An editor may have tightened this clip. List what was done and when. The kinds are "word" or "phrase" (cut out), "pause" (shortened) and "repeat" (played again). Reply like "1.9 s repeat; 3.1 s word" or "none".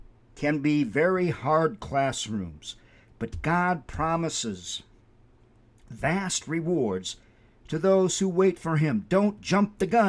none